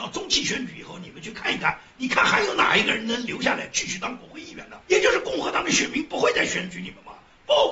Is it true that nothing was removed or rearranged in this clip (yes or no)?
no